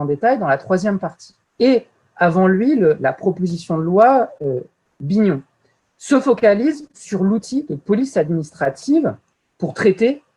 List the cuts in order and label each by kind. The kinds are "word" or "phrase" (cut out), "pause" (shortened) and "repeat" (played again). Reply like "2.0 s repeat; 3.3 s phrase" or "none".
none